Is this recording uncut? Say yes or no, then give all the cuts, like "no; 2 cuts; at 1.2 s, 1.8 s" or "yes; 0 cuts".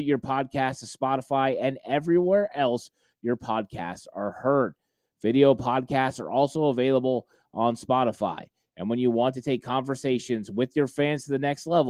yes; 0 cuts